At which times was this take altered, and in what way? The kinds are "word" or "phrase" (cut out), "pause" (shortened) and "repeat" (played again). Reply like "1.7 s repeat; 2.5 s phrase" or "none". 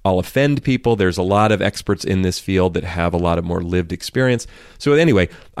none

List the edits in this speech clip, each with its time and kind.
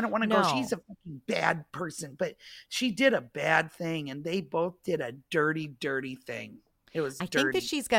none

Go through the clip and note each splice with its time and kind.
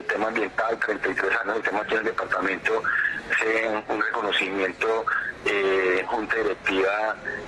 1.4 s word; 1.8 s word; 3.3 s word; 6.1 s word

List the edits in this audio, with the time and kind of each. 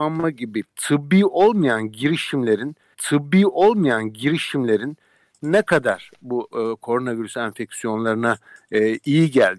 2.9 s repeat

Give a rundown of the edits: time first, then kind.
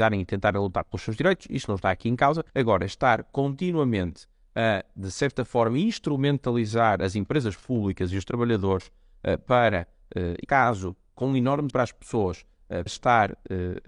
2.5 s pause; 10.4 s word; 11.7 s word; 12.9 s word

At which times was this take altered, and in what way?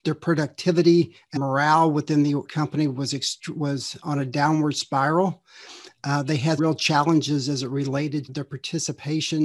1.4 s word; 2.4 s word; 6.6 s word; 8.3 s word

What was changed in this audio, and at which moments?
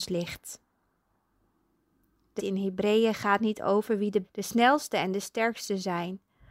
2.4 s word; 4.2 s word

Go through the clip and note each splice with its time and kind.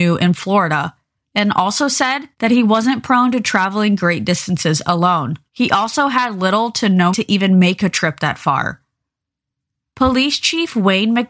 2.3 s pause; 5.5 s pause; 7.1 s word

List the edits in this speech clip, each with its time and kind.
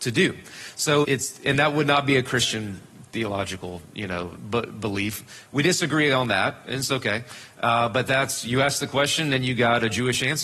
1.0 s word

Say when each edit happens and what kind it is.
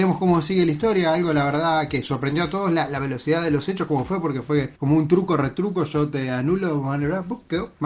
4.7 s pause

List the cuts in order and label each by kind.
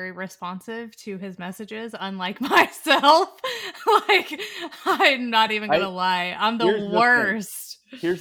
none

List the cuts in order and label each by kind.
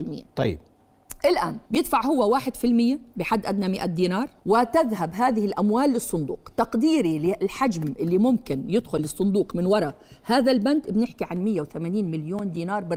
1.7 s pause; 4.4 s pause

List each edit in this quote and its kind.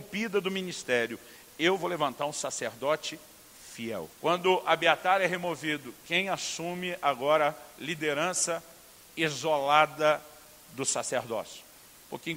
4.1 s pause

